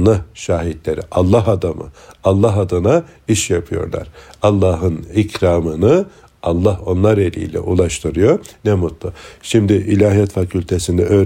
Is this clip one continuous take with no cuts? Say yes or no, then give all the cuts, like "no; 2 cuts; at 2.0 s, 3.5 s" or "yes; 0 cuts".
yes; 0 cuts